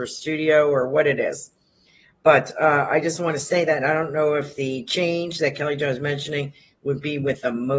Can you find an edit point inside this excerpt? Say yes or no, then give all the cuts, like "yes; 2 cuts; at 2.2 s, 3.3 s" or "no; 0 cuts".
no; 0 cuts